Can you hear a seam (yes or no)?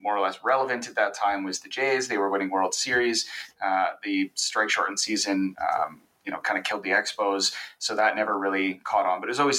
no